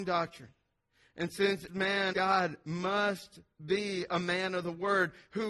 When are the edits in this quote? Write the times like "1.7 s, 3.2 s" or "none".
1.7 s, 2.1 s

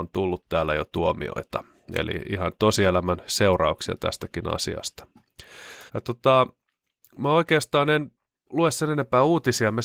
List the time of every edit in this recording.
5.9 s

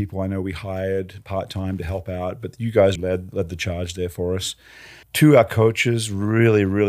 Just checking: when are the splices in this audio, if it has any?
3.0 s, 5.0 s

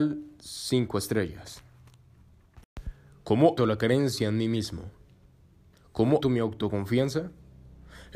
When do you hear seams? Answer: 3.6 s, 6.2 s

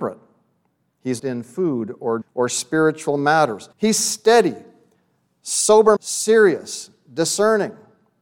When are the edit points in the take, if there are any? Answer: 1.2 s, 2.2 s, 3.7 s, 6.0 s

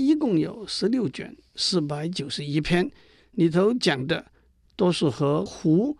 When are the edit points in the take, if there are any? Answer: none

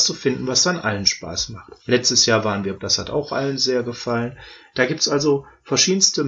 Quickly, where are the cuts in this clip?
1.8 s, 2.8 s

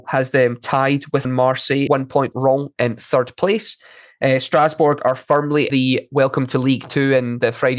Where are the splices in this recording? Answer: 1.2 s, 1.9 s, 2.3 s, 5.7 s

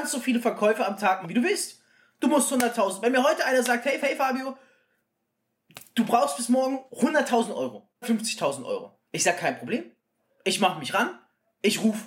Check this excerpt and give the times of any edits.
1.2 s, 4.0 s, 6.9 s, 8.0 s, 9.1 s

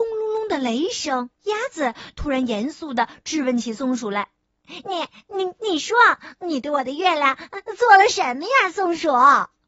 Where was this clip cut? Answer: 1.4 s, 4.4 s

